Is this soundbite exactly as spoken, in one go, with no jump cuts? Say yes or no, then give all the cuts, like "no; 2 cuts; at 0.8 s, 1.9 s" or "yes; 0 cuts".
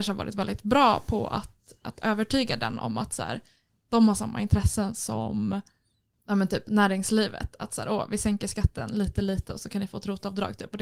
yes; 0 cuts